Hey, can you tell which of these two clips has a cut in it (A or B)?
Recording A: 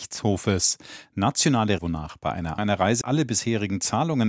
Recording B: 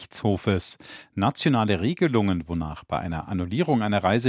A